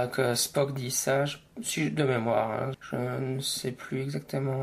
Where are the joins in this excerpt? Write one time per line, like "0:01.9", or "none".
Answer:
0:02.7

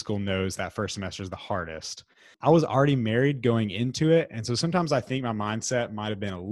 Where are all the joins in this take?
none

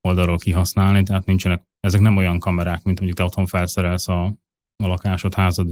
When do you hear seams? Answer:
0:03.0

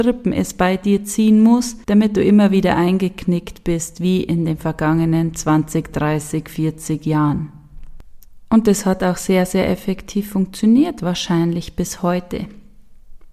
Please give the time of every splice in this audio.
0:01.8

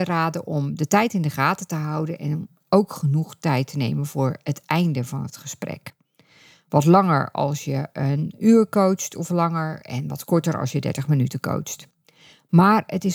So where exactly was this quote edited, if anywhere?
none

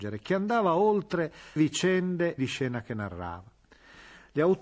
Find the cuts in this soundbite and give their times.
0:01.6
0:02.4

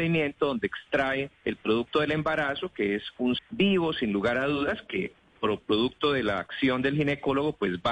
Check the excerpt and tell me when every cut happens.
0:01.3
0:03.4

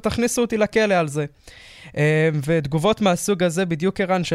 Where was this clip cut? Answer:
none

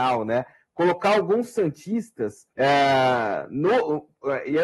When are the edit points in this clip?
0:02.5

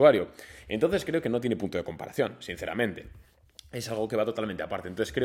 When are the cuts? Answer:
none

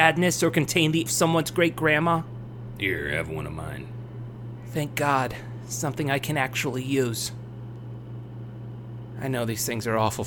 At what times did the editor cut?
0:01.1

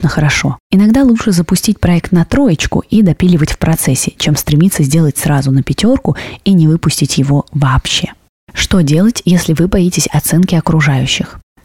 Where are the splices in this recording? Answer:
none

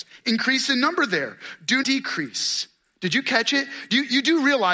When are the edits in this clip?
0:01.8

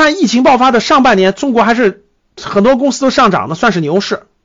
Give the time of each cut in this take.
0:02.2

